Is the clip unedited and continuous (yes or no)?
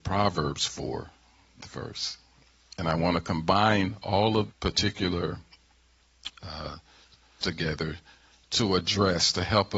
no